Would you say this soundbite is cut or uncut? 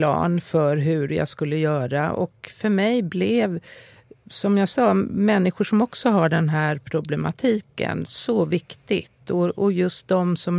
uncut